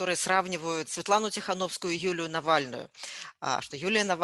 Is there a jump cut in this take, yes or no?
no